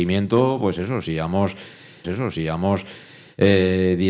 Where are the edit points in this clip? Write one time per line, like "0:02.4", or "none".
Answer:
0:02.0